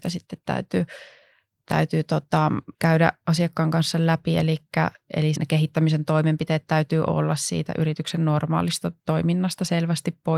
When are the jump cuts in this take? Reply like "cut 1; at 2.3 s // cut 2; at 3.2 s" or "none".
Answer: cut 1; at 2.7 s // cut 2; at 5.4 s